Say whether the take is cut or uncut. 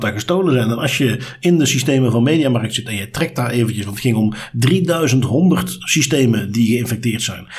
uncut